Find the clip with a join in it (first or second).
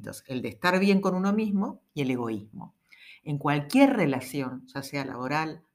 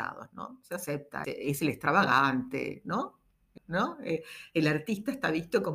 second